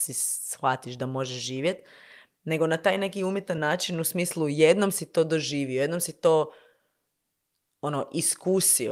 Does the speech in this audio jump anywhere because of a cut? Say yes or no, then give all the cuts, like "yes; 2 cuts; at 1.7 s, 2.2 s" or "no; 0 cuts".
no; 0 cuts